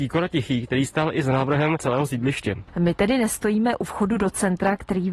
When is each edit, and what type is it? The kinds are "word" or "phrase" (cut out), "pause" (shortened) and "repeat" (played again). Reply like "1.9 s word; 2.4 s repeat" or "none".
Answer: none